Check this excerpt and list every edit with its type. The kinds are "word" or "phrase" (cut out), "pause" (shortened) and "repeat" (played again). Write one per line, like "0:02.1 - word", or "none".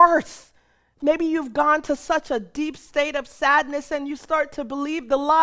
none

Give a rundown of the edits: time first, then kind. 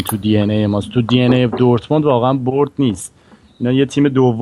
none

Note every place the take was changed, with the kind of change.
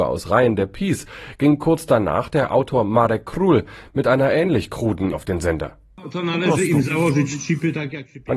0:05.1 - word

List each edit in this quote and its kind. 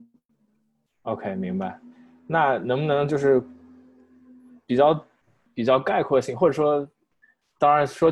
none

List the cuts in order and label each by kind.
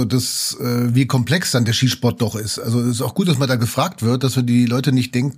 none

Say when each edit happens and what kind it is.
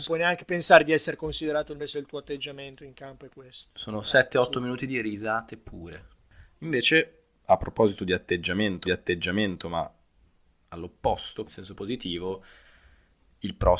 0:01.8 - word
0:08.8 - repeat
0:11.5 - word

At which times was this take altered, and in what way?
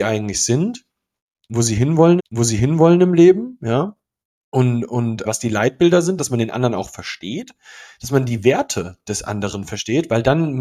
0:02.2 - repeat
0:04.2 - pause
0:05.2 - word

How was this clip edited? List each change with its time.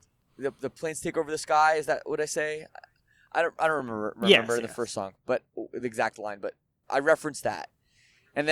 none

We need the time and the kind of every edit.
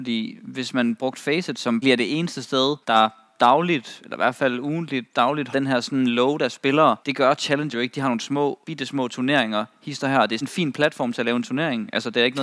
0:01.8 - word
0:02.8 - pause
0:05.5 - word
0:07.0 - pause
0:07.7 - word
0:08.6 - pause
0:10.4 - word

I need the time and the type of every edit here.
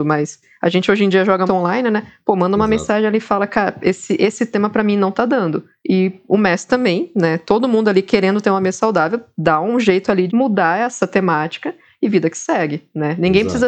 0:01.5 - word
0:10.3 - word

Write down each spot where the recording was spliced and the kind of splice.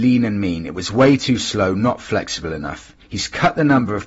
none

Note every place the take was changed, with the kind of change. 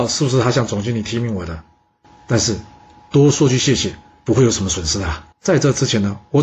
0:05.3 - pause

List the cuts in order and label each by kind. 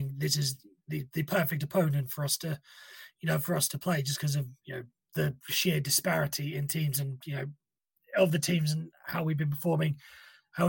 none

